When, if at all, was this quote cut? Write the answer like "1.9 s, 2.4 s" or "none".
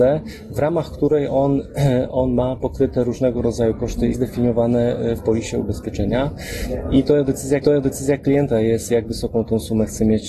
4.1 s, 5.2 s, 7.6 s

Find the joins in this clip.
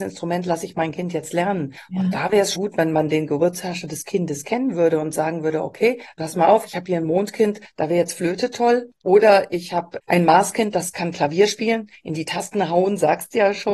2.6 s

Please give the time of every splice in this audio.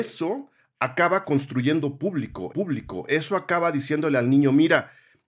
2.5 s

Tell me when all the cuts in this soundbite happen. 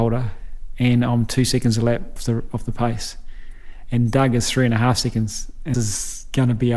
2.2 s, 5.7 s

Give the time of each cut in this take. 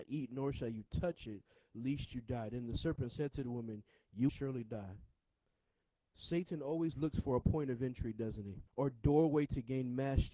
4.3 s, 8.7 s

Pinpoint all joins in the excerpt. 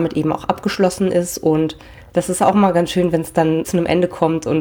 3.6 s

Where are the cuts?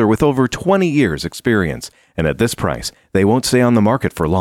none

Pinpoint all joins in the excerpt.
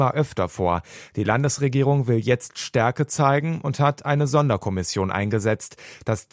none

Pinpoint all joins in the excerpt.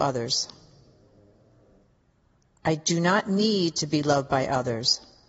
none

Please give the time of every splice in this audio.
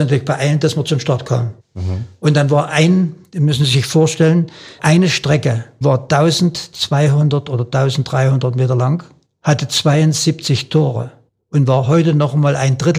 4.8 s, 5.8 s

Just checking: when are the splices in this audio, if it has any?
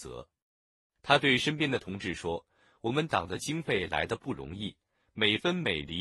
none

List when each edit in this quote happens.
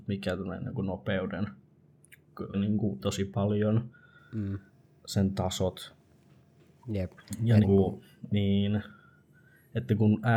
2.5 s, 3.0 s, 7.6 s

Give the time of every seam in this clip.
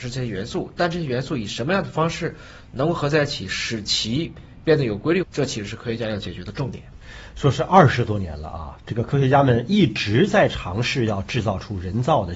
5.2 s

